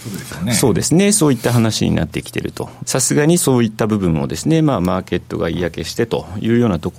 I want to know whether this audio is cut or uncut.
cut